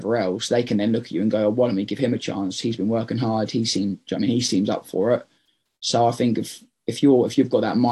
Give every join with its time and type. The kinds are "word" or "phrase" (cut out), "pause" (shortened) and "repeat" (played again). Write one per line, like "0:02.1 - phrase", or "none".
none